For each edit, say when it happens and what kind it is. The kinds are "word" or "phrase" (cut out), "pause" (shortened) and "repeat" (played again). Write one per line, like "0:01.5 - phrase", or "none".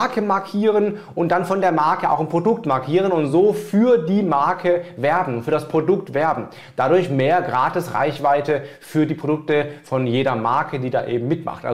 none